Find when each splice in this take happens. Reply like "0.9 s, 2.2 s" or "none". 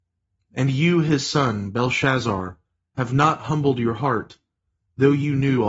none